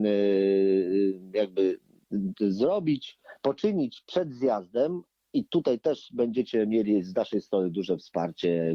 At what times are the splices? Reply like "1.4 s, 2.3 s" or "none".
none